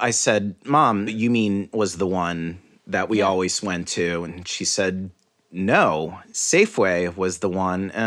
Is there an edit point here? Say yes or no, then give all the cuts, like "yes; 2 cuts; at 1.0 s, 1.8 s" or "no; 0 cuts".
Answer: yes; 2 cuts; at 1.1 s, 1.7 s